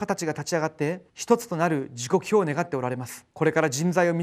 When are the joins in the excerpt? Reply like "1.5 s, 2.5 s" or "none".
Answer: 1.1 s, 3.3 s